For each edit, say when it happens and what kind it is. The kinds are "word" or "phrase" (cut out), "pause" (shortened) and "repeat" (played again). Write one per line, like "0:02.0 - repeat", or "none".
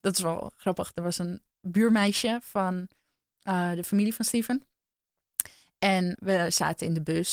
0:06.2 - word